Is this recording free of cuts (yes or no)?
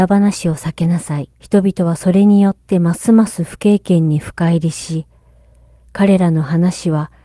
no